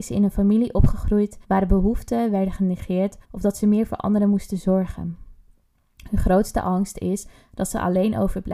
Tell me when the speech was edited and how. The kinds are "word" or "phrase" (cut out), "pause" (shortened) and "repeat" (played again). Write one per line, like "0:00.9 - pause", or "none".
0:01.4 - pause
0:03.2 - pause